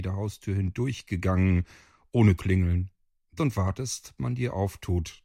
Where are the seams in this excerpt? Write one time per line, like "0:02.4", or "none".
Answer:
0:02.4
0:03.4
0:04.2

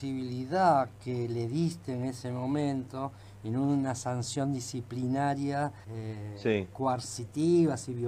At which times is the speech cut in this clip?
0:05.8

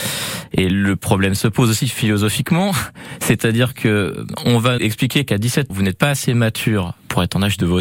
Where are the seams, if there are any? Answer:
0:04.8
0:05.7

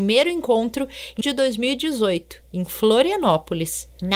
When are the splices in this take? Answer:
0:01.2
0:02.4

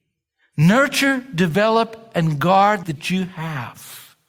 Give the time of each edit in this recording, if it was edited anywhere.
0:02.8

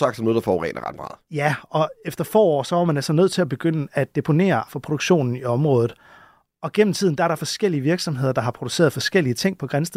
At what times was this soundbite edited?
0:04.7

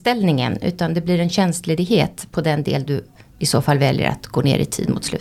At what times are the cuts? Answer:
none

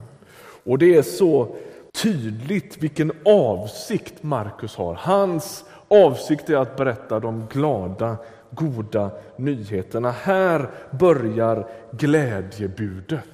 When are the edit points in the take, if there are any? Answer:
0:01.9

